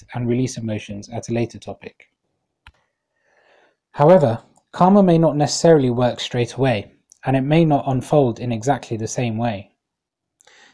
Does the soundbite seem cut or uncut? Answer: uncut